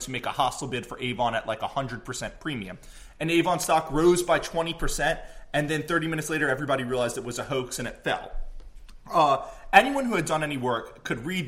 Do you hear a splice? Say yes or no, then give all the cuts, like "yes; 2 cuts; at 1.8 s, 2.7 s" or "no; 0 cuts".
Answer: no; 0 cuts